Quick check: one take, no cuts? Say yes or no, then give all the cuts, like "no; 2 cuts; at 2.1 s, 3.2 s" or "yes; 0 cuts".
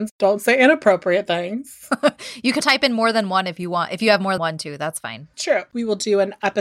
no; 2 cuts; at 2.6 s, 4.4 s